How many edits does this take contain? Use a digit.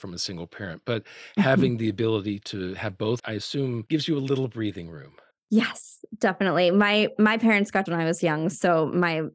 3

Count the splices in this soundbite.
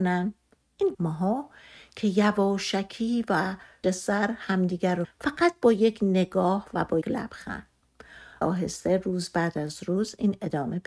5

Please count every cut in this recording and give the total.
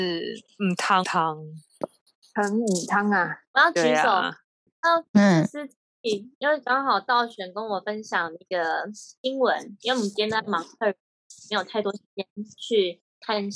2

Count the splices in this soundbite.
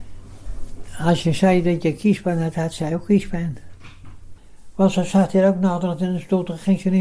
0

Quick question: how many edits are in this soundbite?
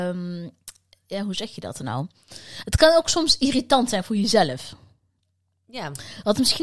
0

